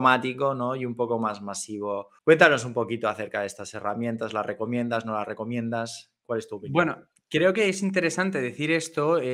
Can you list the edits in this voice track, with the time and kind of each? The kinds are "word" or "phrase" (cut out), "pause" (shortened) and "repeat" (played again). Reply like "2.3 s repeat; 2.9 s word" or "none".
2.2 s pause